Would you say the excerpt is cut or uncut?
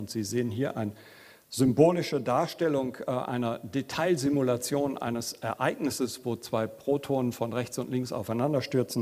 uncut